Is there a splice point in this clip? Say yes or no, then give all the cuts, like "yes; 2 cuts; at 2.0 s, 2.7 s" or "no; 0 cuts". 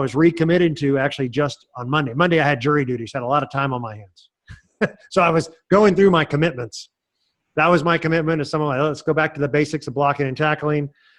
no; 0 cuts